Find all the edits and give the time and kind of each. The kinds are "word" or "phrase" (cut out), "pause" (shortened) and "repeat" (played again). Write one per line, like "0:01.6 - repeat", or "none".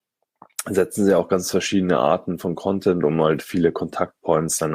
none